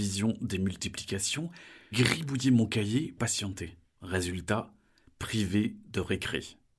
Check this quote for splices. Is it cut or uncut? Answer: cut